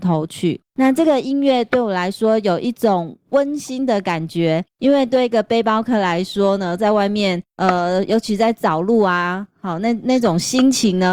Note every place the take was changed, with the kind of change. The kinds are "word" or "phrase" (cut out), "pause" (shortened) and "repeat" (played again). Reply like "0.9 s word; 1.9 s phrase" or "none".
none